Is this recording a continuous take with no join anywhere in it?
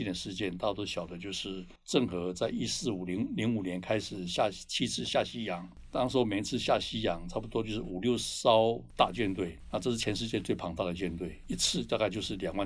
no; 1 cut; at 1.8 s

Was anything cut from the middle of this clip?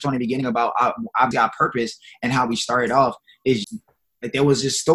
yes; 2 cuts; at 1.3 s, 3.6 s

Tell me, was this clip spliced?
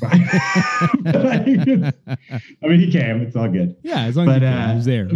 no; 0 cuts

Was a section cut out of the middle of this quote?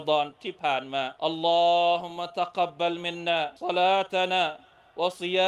yes; 2 cuts; at 1.2 s, 3.6 s

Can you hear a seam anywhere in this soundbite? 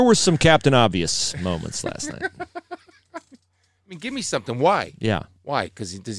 no; 0 cuts

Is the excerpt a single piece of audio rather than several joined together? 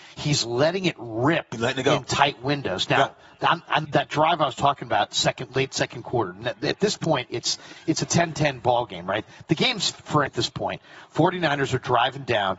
no; 2 cuts; at 3.8 s, 10.3 s

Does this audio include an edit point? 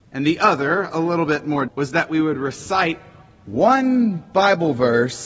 yes; 1 cut; at 1.7 s

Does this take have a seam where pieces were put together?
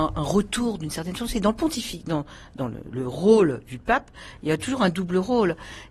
yes; 1 cut; at 2.9 s

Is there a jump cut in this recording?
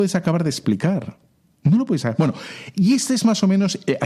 no; 0 cuts

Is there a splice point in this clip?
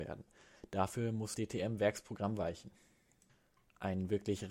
yes; 1 cut; at 1.3 s

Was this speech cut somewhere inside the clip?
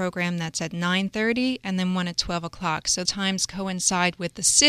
yes; 1 cut; at 3.0 s

